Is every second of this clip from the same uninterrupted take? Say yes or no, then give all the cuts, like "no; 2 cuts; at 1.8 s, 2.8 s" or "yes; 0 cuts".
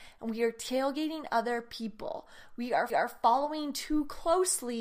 no; 1 cut; at 2.9 s